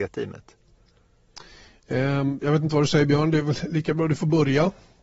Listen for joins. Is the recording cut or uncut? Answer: uncut